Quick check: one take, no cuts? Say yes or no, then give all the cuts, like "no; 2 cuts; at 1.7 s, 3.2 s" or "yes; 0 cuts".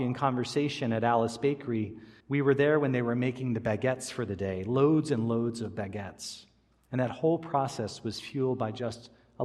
no; 1 cut; at 2.2 s